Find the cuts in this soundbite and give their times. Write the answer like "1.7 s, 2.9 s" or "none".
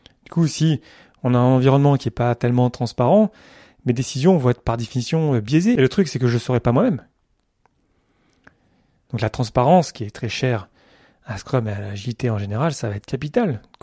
none